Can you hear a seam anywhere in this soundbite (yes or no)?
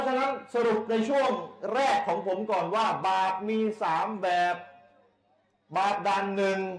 no